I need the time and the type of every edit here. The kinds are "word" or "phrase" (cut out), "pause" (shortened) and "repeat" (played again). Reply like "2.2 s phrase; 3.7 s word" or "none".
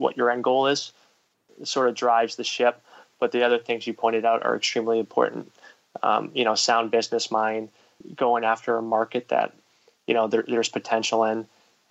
none